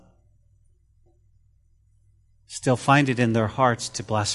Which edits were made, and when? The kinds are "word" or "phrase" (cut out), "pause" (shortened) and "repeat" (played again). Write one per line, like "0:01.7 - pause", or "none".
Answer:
none